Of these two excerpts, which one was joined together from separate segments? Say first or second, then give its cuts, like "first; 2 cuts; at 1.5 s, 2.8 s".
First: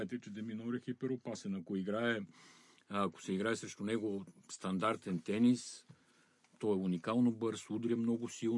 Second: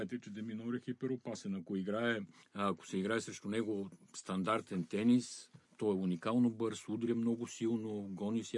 second; 2 cuts; at 2.4 s, 5.6 s